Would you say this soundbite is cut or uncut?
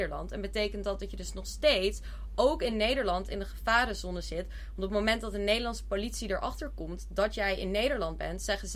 uncut